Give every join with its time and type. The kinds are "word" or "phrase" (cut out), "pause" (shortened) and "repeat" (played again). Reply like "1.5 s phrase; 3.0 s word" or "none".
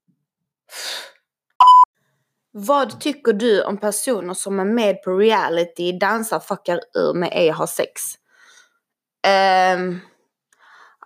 none